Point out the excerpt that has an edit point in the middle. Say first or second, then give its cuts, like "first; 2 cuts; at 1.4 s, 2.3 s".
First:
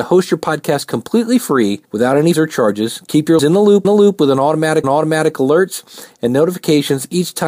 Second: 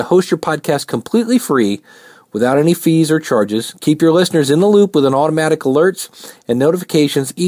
first; 5 cuts; at 1.8 s, 2.3 s, 3.4 s, 3.8 s, 4.8 s